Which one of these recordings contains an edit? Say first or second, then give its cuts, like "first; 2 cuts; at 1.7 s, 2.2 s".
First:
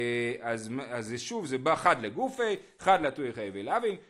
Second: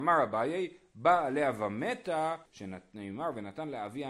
second; 1 cut; at 2.5 s